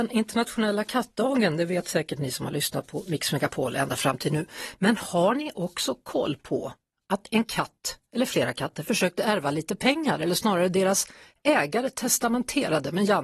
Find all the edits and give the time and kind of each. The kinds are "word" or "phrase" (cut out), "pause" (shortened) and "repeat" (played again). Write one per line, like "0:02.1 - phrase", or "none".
none